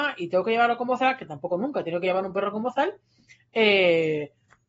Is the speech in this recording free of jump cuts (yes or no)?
yes